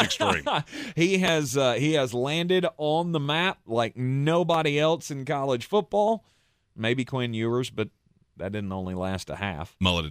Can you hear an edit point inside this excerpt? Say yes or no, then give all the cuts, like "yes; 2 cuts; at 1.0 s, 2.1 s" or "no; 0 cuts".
no; 0 cuts